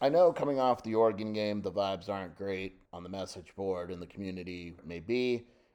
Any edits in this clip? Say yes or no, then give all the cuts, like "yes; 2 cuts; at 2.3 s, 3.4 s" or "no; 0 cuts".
yes; 2 cuts; at 2.9 s, 4.8 s